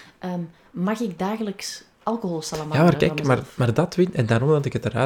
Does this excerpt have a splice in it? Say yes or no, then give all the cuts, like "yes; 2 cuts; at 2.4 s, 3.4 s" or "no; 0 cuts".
no; 0 cuts